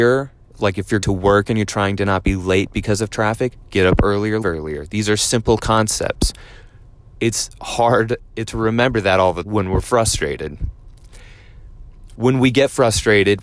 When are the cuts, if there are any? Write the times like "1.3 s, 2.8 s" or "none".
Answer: 1.0 s, 4.4 s, 7.1 s, 8.5 s, 9.4 s

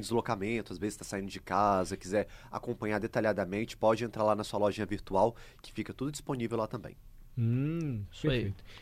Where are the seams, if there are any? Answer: none

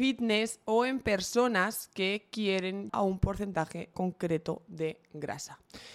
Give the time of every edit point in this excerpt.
2.9 s, 3.9 s

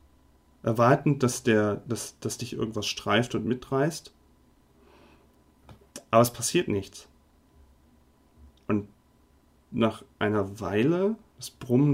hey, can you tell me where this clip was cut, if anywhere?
none

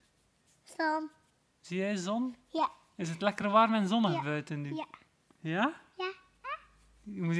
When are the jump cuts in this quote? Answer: none

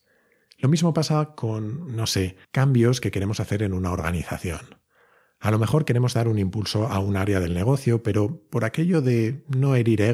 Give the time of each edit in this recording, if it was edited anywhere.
2.4 s

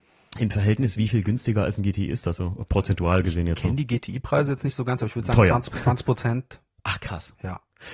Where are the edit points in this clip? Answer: 2.4 s

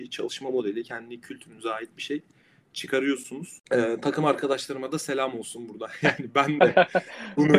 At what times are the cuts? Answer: none

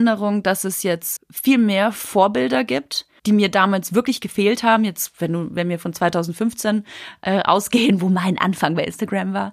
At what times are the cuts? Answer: 1.2 s, 3.2 s

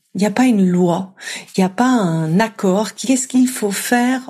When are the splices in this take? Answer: 3.0 s

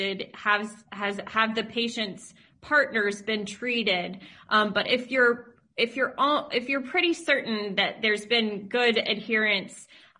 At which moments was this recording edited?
none

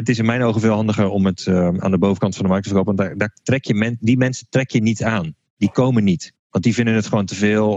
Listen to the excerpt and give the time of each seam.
none

